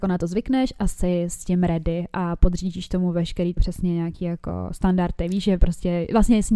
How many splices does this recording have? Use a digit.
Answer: 1